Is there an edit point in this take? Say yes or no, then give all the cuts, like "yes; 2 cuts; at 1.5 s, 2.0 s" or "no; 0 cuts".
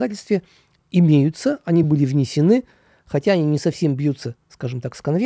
no; 0 cuts